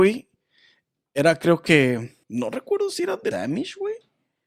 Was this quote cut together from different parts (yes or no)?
yes